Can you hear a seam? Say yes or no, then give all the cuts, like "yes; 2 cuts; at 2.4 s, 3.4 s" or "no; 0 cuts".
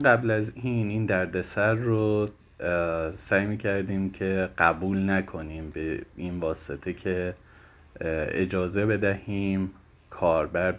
no; 0 cuts